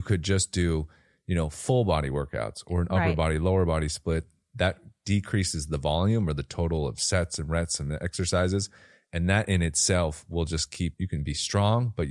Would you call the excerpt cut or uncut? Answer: cut